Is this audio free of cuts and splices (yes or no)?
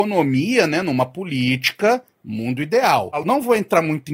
yes